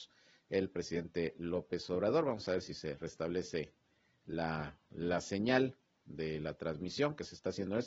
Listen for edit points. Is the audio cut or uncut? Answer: uncut